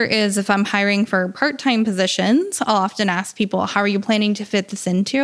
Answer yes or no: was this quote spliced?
no